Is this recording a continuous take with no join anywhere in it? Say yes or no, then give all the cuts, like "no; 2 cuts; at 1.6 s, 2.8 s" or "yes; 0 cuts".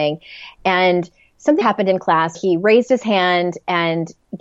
no; 2 cuts; at 1.6 s, 2.3 s